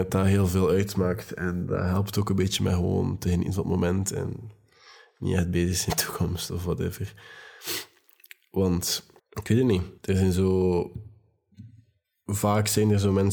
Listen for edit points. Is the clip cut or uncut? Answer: cut